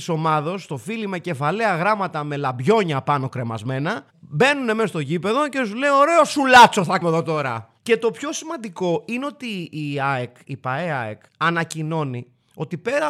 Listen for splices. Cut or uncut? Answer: cut